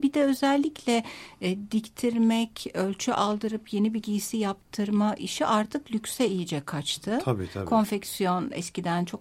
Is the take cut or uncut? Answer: uncut